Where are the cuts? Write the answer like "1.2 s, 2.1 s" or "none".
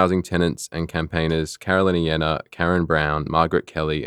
none